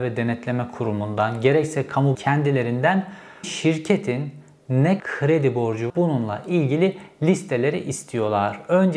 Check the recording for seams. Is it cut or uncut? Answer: cut